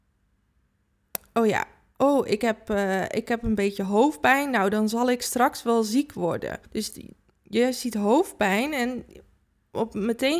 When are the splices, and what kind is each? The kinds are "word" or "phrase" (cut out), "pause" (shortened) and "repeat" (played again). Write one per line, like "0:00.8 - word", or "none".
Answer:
0:06.7 - pause